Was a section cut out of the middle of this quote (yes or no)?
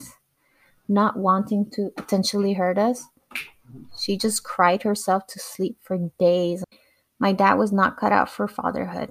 no